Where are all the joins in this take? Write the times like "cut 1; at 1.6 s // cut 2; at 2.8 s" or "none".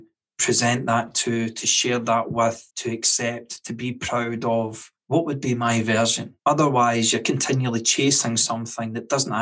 cut 1; at 2.7 s // cut 2; at 5.0 s // cut 3; at 6.4 s